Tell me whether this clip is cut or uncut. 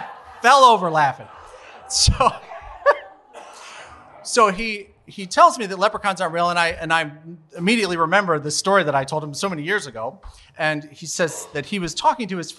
uncut